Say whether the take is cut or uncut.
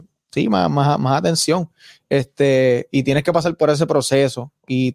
uncut